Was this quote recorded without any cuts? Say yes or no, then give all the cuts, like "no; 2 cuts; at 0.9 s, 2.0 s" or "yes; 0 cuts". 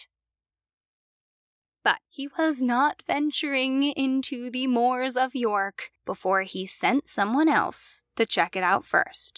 no; 2 cuts; at 2.0 s, 6.0 s